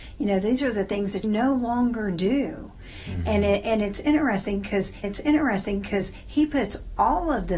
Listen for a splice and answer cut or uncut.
cut